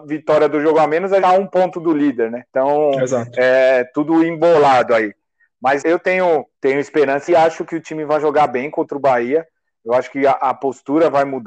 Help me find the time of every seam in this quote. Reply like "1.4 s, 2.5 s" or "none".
1.2 s, 2.5 s, 5.8 s, 6.5 s, 7.3 s